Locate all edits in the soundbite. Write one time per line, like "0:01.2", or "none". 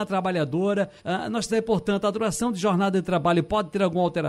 0:01.0
0:01.5